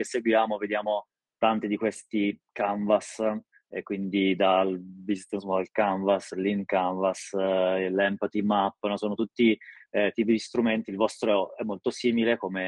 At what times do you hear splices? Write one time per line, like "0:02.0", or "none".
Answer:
none